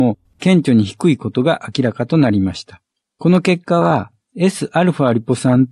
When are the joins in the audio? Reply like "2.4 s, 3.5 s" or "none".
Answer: none